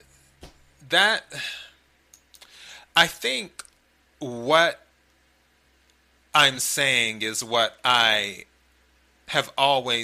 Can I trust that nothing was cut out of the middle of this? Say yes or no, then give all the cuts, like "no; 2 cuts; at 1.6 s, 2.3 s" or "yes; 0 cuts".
yes; 0 cuts